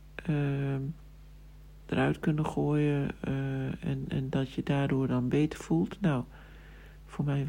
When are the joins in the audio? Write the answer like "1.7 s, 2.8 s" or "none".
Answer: none